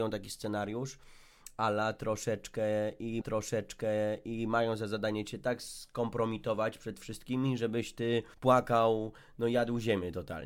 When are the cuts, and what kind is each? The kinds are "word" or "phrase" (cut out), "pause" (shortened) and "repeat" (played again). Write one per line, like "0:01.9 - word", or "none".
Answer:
0:03.2 - repeat
0:08.3 - pause